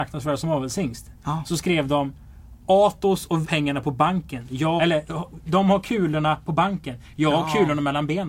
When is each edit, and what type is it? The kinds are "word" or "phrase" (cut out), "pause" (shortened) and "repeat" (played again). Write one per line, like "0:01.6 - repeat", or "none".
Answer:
0:03.4 - phrase
0:04.8 - phrase